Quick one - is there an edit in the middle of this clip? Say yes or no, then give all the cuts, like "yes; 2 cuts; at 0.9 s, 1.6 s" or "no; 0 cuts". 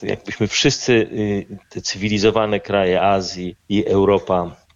yes; 1 cut; at 3.6 s